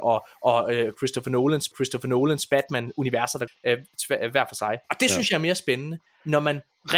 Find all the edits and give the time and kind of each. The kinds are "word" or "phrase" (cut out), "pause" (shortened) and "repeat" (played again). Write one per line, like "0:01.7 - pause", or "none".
0:01.7 - repeat
0:03.5 - phrase
0:04.8 - pause